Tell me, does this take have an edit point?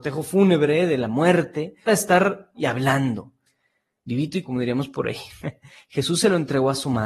yes; 3 cuts; at 1.9 s, 2.5 s, 4.4 s

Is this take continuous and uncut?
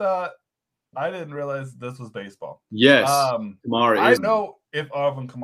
no; 1 cut; at 4.2 s

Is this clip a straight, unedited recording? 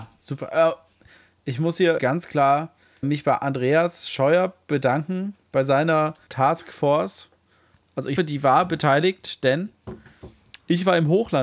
no; 4 cuts; at 2.0 s, 3.0 s, 6.3 s, 8.2 s

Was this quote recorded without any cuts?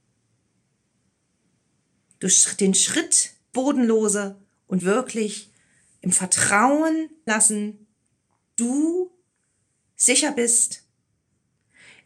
no; 4 cuts; at 3.5 s, 4.8 s, 7.3 s, 8.5 s

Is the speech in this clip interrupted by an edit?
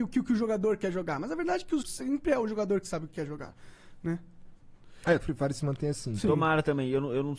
yes; 2 cuts; at 1.8 s, 5.2 s

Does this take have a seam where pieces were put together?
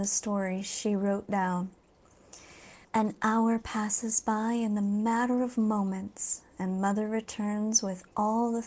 yes; 1 cut; at 2.8 s

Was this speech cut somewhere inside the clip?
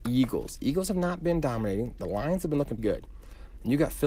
yes; 1 cut; at 2.8 s

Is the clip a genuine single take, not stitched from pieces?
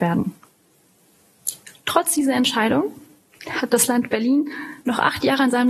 yes; 0 cuts

